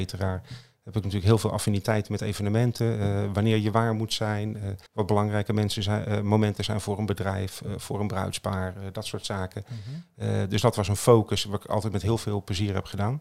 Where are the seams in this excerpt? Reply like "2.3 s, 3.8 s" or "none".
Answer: 4.9 s